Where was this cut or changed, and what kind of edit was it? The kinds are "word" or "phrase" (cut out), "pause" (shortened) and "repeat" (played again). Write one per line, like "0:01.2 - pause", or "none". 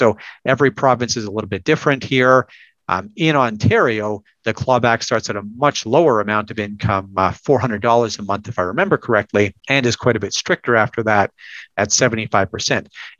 0:09.6 - pause